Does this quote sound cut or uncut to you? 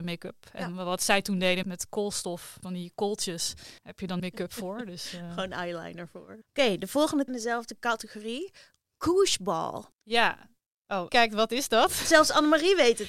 cut